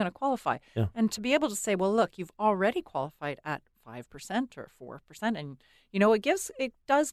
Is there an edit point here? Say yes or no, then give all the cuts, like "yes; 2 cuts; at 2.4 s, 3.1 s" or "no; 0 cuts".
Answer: no; 0 cuts